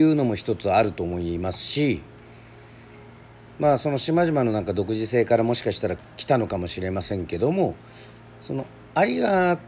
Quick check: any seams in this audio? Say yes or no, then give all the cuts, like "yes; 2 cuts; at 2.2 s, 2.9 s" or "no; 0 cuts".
no; 0 cuts